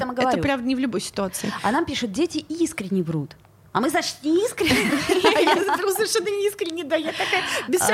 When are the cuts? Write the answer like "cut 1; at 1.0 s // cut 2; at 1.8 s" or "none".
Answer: none